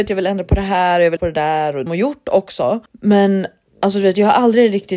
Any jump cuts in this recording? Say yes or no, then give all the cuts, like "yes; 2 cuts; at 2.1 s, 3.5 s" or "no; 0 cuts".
yes; 3 cuts; at 1.2 s, 1.9 s, 2.9 s